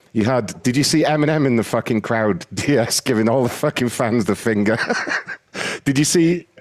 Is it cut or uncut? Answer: uncut